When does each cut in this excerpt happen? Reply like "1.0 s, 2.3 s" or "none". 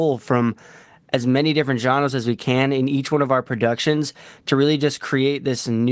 none

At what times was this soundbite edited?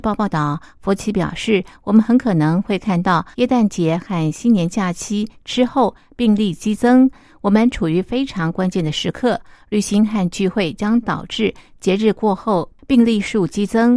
3.3 s

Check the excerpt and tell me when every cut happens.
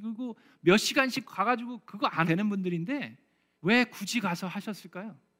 1.2 s, 1.8 s, 2.2 s, 3.5 s

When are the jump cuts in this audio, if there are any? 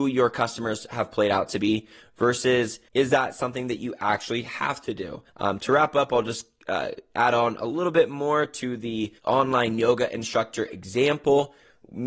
2.9 s, 5.3 s, 9.2 s

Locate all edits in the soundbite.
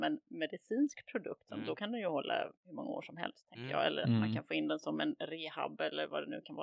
2.6 s

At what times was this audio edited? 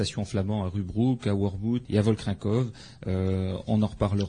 1.8 s

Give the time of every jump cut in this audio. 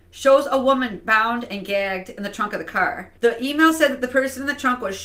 3.2 s

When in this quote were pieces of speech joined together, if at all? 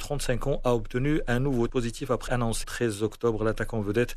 1.7 s, 2.3 s, 2.6 s

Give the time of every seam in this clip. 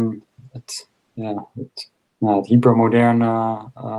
none

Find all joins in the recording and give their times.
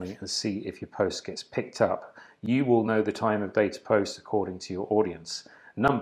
none

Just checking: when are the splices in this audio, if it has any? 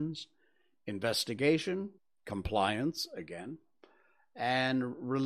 2.0 s

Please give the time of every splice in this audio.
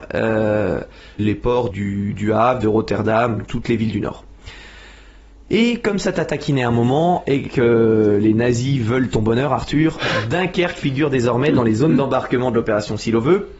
1.2 s, 1.7 s

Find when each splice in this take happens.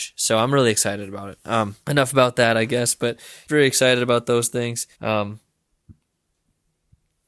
1.8 s, 3.5 s, 4.9 s

